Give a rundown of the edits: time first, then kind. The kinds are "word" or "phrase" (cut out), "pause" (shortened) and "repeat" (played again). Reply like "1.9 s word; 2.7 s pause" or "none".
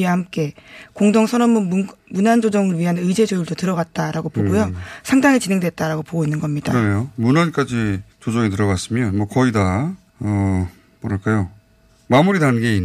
8.1 s pause; 10.1 s pause